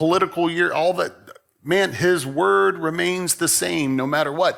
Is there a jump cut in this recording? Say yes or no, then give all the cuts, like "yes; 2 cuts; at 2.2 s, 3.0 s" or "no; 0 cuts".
no; 0 cuts